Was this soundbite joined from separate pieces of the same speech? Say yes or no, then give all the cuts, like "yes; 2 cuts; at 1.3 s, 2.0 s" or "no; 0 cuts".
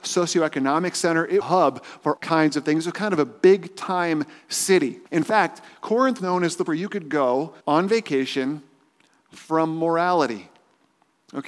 yes; 6 cuts; at 1.4 s, 2.2 s, 5.1 s, 6.2 s, 6.7 s, 7.6 s